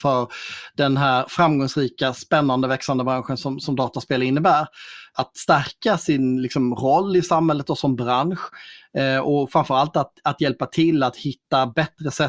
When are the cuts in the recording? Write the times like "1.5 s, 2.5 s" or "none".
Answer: none